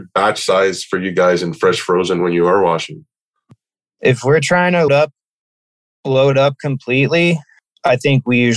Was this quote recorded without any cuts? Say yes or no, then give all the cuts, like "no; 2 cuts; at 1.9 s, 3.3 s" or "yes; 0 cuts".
no; 1 cut; at 4.9 s